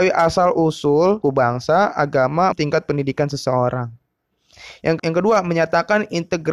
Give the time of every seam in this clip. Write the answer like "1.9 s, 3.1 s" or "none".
1.2 s, 2.5 s, 5.0 s